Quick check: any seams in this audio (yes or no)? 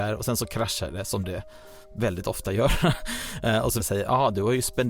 yes